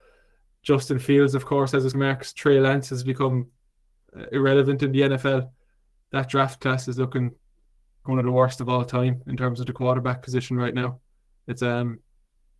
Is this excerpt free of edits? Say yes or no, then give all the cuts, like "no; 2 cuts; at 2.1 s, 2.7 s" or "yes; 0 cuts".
no; 3 cuts; at 1.9 s, 8.0 s, 11.6 s